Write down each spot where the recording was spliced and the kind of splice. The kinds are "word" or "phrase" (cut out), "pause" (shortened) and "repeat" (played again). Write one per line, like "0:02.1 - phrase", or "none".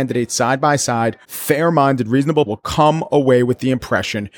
0:01.2 - word
0:02.5 - word